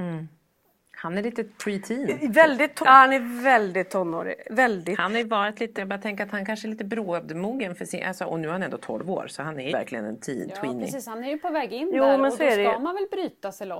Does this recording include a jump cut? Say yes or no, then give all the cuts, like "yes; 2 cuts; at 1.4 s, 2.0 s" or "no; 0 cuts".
yes; 3 cuts; at 2.8 s, 5.8 s, 9.7 s